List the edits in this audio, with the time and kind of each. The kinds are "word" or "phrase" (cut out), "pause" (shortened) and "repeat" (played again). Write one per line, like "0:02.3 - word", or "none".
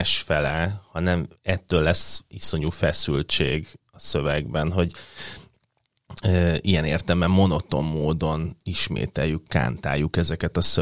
0:01.4 - pause

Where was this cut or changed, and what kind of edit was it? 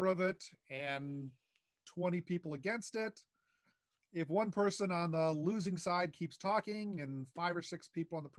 none

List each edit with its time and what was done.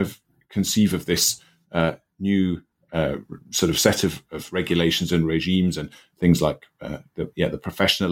none

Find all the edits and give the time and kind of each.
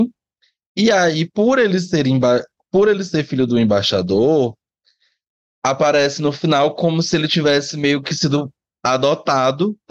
none

